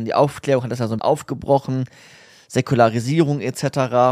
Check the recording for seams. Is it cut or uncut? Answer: cut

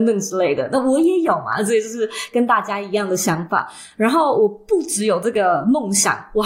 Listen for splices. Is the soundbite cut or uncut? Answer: uncut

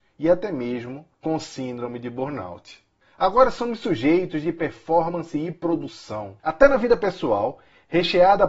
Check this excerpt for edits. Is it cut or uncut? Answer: cut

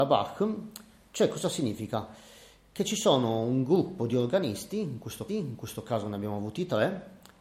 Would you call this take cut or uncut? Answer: cut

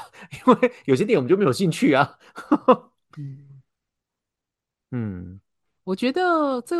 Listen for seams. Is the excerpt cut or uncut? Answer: uncut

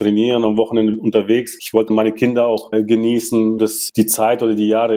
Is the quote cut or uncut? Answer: cut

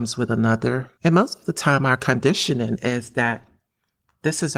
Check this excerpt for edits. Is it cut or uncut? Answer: cut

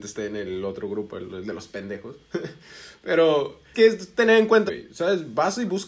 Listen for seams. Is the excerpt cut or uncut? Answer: cut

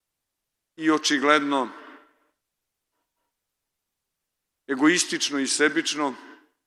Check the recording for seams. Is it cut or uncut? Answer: uncut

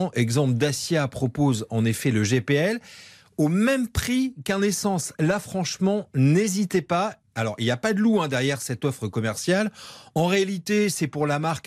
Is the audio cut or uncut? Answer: uncut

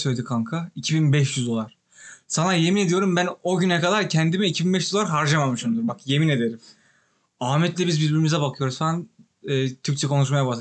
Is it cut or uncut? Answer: uncut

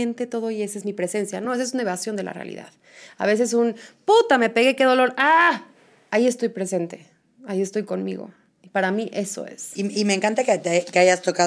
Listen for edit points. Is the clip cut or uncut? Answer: uncut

